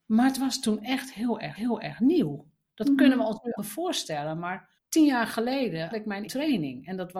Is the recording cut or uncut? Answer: cut